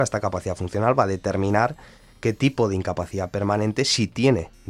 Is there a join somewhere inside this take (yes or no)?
no